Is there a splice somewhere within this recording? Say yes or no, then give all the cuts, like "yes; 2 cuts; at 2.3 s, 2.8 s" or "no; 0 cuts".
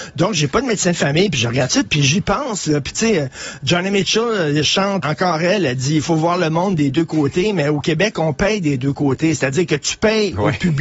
yes; 2 cuts; at 1.8 s, 5.0 s